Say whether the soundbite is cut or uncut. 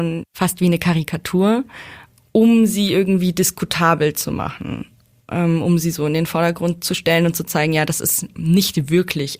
uncut